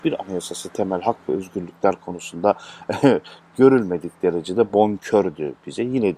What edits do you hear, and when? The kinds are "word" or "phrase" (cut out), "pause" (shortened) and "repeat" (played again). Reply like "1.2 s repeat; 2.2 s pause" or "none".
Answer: none